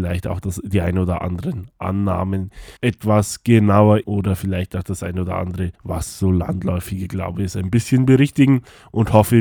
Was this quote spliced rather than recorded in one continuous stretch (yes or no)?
yes